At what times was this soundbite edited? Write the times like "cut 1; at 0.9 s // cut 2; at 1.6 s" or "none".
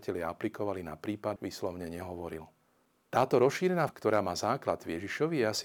cut 1; at 1.4 s // cut 2; at 3.9 s